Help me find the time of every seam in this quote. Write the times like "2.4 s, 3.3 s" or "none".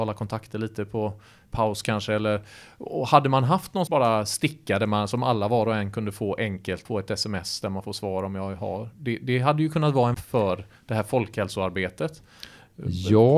3.9 s, 6.8 s, 10.1 s